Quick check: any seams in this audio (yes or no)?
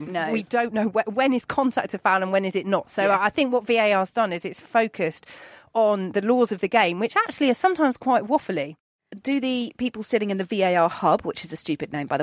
no